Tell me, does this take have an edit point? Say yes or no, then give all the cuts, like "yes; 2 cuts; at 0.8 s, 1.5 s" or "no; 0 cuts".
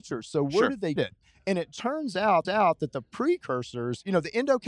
yes; 2 cuts; at 1.0 s, 2.4 s